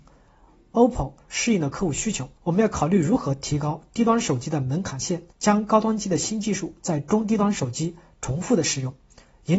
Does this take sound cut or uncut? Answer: cut